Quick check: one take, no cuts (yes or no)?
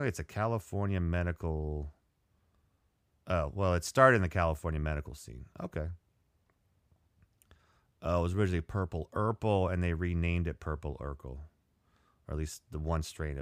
yes